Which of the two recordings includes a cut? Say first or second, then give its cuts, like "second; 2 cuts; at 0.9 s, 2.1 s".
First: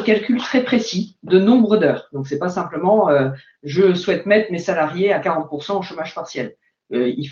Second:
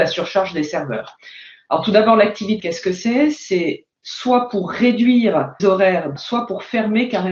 second; 3 cuts; at 2.6 s, 5.6 s, 6.2 s